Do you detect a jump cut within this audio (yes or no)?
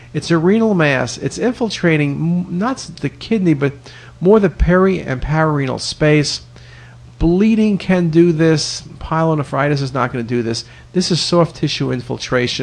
yes